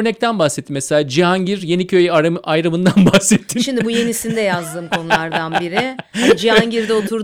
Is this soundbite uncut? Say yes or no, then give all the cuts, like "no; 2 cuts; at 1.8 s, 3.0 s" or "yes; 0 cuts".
yes; 0 cuts